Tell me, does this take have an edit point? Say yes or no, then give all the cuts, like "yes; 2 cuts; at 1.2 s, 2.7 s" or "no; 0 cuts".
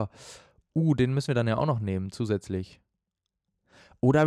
no; 0 cuts